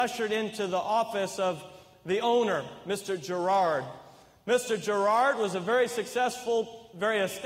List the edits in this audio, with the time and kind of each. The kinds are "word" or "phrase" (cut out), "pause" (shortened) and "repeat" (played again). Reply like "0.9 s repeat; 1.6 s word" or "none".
none